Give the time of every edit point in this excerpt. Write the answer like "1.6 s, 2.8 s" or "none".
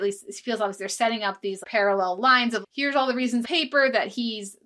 1.6 s, 2.6 s, 3.4 s